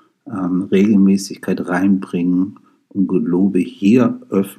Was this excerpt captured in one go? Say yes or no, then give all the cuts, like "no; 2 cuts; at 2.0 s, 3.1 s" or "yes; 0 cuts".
yes; 0 cuts